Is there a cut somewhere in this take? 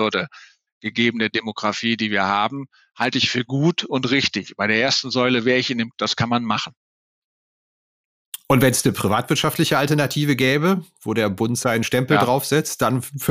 yes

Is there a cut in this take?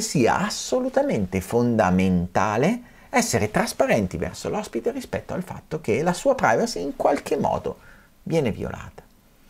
no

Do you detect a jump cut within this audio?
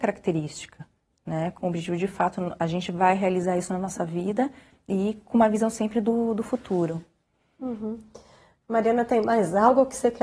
no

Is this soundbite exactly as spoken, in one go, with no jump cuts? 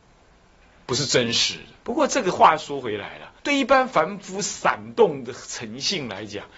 no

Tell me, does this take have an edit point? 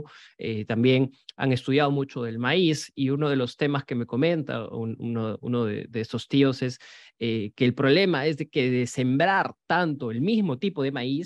no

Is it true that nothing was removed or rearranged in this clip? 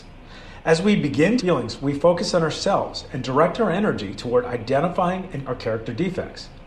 no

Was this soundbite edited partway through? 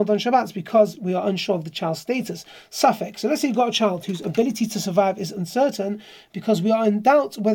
no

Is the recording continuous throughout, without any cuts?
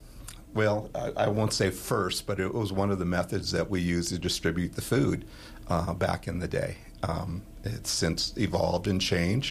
yes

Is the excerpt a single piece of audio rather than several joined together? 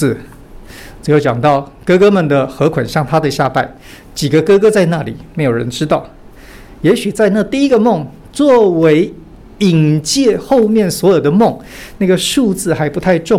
yes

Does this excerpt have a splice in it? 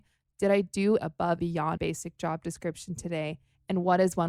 yes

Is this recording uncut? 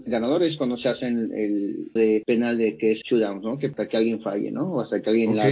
no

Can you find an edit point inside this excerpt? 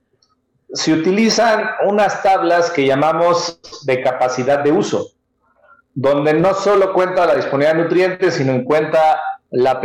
no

